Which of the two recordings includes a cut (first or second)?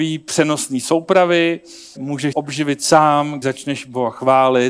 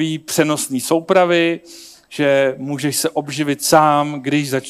first